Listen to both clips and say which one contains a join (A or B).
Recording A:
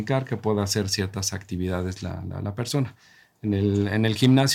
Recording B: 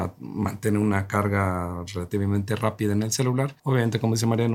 B